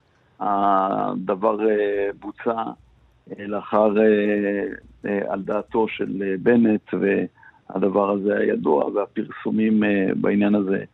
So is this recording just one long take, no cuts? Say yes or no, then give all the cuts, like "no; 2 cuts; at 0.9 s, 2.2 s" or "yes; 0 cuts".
yes; 0 cuts